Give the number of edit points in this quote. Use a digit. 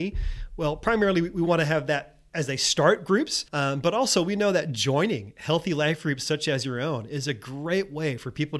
1